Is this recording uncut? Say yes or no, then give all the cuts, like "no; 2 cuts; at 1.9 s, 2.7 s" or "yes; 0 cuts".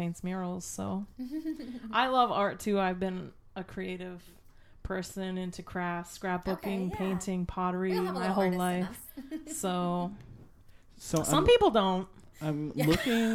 yes; 0 cuts